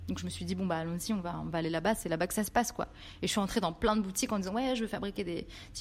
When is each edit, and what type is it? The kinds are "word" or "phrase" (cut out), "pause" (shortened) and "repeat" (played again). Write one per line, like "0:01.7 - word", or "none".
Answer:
none